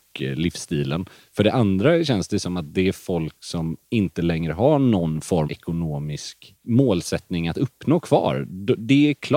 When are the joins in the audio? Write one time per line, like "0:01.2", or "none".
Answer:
0:03.8
0:05.5

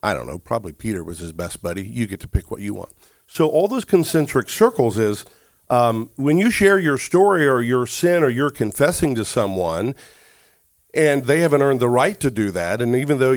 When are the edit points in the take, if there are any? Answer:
none

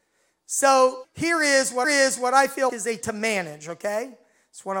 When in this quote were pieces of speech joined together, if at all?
0:01.0
0:01.8
0:02.7
0:03.0

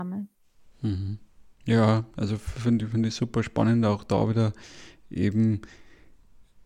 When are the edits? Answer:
none

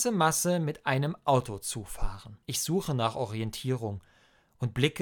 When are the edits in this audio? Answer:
0:02.4

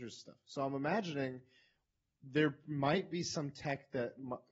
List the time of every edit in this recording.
none

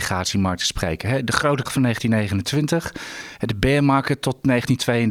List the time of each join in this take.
0:01.7

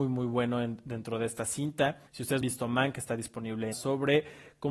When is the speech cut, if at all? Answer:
0:02.1
0:02.4
0:03.7

